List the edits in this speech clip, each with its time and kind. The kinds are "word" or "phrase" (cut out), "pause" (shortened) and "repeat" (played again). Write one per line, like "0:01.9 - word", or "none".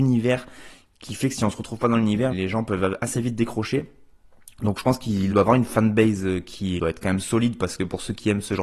0:02.3 - word
0:05.3 - word
0:06.8 - word